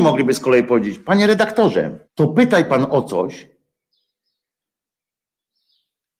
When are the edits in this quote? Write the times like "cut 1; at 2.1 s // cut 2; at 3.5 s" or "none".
cut 1; at 2.1 s